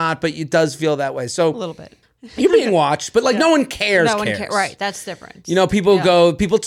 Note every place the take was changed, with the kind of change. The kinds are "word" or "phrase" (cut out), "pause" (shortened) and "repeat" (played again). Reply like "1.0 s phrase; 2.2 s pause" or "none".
2.0 s pause